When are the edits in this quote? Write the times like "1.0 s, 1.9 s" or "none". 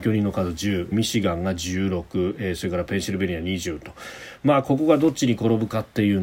0.9 s